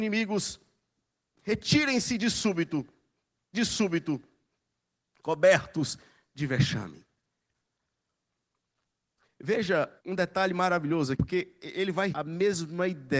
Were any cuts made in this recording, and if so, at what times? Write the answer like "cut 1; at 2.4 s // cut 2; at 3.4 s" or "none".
cut 1; at 3.5 s // cut 2; at 10.0 s // cut 3; at 11.1 s // cut 4; at 12.1 s